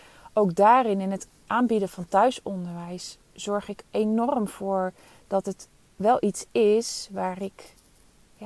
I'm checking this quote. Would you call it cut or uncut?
uncut